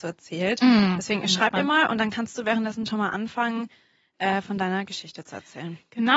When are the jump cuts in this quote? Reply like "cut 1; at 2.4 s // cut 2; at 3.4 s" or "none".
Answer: none